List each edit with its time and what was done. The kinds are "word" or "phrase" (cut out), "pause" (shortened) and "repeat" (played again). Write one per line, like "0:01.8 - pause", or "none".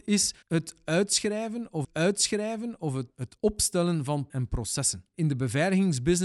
0:01.8 - repeat
0:04.3 - word